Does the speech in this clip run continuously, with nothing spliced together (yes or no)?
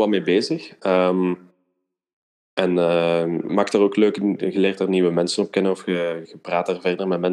no